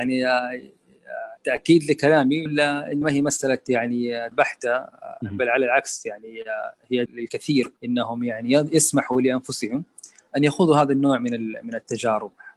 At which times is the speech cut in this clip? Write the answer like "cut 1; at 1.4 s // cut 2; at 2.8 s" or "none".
cut 1; at 1.4 s // cut 2; at 2.5 s // cut 3; at 3.0 s // cut 4; at 4.3 s // cut 5; at 7.1 s // cut 6; at 7.8 s